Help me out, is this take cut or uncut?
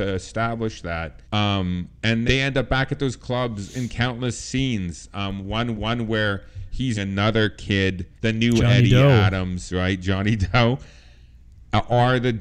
cut